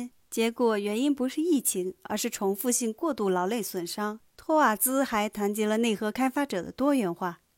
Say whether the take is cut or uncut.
cut